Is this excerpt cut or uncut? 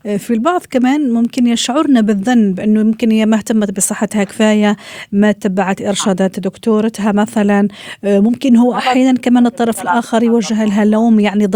uncut